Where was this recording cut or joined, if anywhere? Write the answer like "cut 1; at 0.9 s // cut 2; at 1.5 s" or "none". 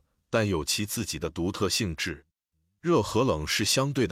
none